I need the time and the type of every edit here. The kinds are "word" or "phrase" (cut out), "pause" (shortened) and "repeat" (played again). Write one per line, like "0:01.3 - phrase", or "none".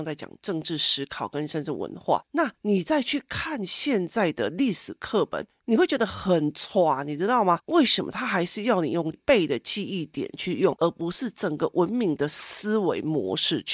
0:02.5 - pause
0:05.5 - pause